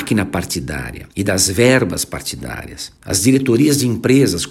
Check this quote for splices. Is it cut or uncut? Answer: cut